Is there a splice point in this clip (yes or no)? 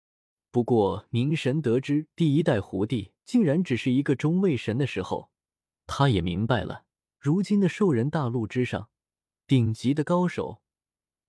yes